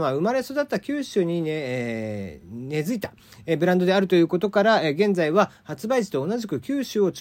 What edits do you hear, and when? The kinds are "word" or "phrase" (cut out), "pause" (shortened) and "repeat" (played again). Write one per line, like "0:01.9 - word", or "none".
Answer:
none

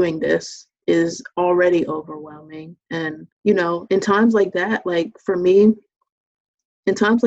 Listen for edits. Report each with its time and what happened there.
0:03.3 - pause

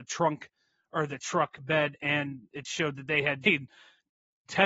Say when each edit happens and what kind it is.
0:03.4 - word

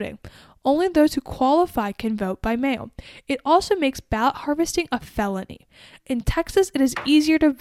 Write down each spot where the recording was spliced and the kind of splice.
none

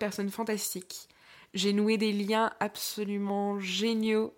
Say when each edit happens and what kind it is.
none

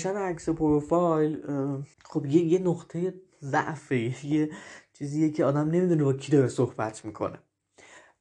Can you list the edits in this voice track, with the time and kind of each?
0:01.9 - pause

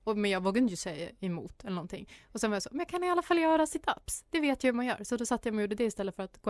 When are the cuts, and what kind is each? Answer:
none

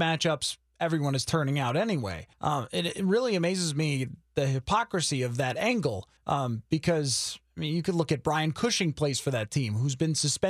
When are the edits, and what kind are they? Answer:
0:02.3 - pause
0:06.2 - pause

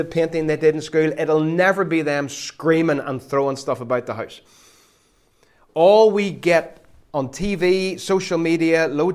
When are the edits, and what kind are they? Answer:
none

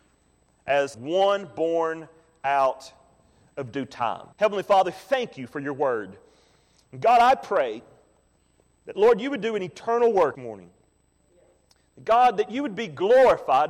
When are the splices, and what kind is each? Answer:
0:00.9 - word
0:04.3 - pause
0:08.4 - pause
0:10.3 - phrase

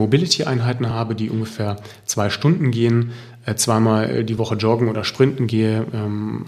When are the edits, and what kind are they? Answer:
none

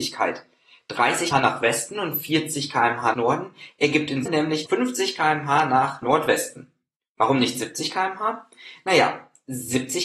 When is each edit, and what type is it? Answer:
0:01.3 - word
0:03.1 - word
0:04.3 - word
0:04.7 - word
0:06.0 - word

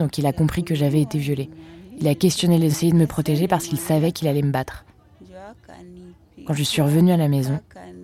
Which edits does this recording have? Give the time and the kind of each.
0:02.7 - phrase

